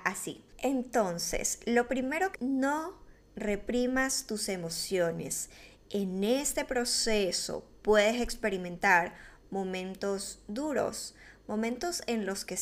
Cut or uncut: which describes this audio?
cut